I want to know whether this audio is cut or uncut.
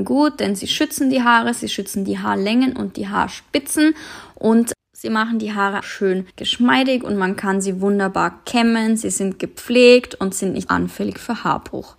cut